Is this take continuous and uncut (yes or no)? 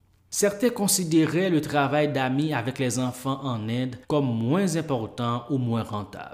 no